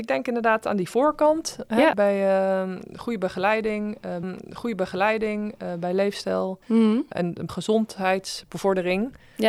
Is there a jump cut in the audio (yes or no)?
yes